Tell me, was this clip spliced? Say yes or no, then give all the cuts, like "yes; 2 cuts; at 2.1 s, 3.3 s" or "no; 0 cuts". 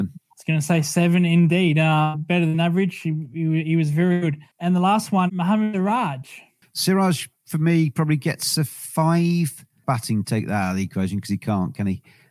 yes; 2 cuts; at 4.5 s, 5.3 s